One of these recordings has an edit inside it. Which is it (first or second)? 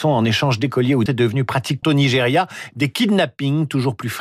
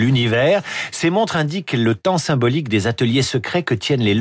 first